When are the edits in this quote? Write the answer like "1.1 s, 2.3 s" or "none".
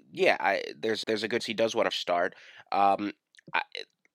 1.0 s, 1.4 s, 1.9 s